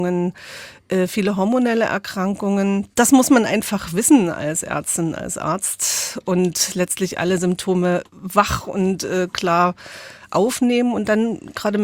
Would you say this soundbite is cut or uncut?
cut